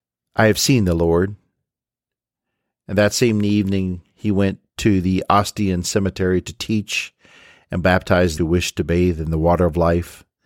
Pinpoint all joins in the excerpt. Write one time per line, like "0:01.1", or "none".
0:08.4